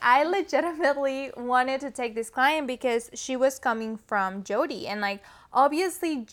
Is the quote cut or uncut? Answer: uncut